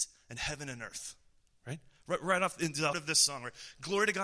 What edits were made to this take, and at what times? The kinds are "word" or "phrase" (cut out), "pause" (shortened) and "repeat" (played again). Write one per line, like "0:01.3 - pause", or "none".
0:02.9 - word